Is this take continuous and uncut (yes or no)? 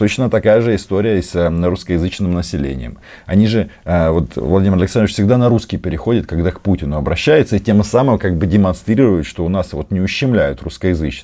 yes